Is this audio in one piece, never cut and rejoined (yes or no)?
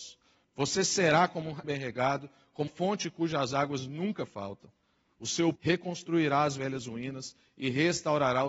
no